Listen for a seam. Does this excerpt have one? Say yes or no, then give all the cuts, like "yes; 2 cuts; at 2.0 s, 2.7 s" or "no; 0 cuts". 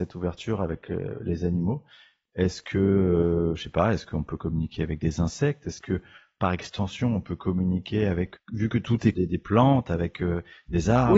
yes; 2 cuts; at 8.4 s, 9.1 s